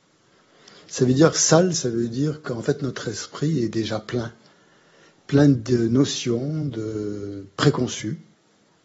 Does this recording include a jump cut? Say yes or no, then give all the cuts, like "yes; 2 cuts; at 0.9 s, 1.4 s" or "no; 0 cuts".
no; 0 cuts